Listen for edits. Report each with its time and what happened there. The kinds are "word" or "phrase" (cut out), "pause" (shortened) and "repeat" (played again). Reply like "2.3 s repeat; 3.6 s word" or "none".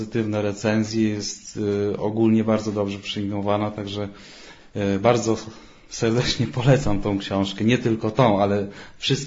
none